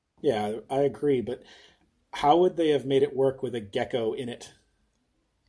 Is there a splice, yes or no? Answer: no